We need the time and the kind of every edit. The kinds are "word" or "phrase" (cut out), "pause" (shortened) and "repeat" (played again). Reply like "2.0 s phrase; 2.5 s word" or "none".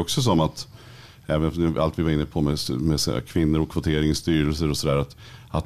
none